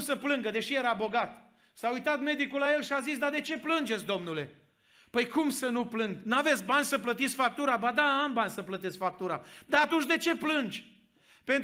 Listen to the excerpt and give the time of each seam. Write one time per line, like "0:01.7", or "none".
none